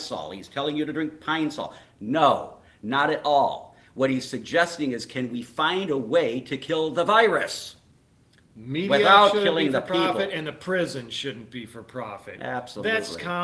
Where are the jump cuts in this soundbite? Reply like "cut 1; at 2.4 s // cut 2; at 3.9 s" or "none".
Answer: none